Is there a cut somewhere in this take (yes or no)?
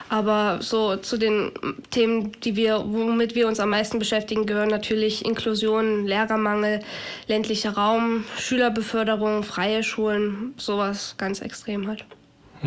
no